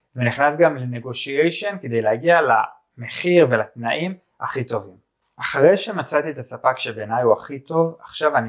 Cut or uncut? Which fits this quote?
uncut